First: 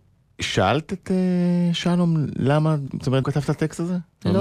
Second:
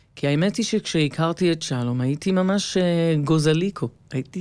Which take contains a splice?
first; 2 cuts; at 2.9 s, 3.2 s

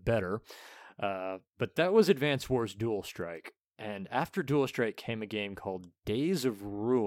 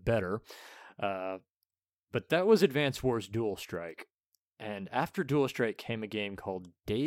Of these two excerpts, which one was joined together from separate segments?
first; 2 cuts; at 1.5 s, 3.6 s

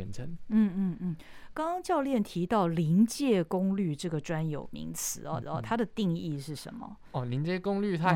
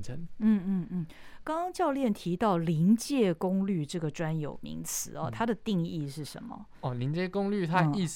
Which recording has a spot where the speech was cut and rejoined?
first; 1 cut; at 5.4 s

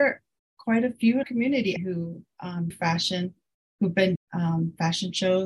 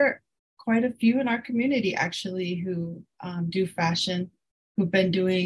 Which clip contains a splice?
first; 4 cuts; at 1.2 s, 1.8 s, 2.7 s, 4.2 s

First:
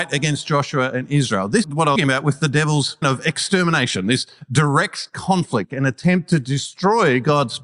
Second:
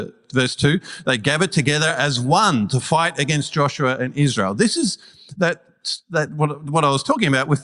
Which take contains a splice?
first; 3 cuts; at 1.6 s, 2.0 s, 3.0 s

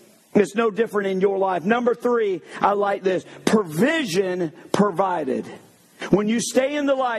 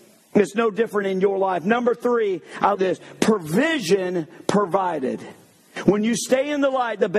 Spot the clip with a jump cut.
second; 1 cut; at 2.7 s

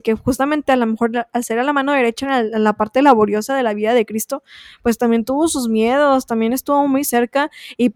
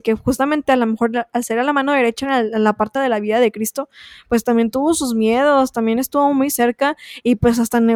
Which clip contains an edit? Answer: second; 1 cut; at 3.0 s

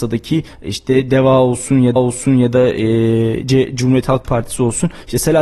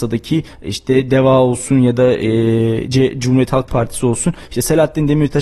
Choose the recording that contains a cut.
first; 1 cut; at 2.0 s

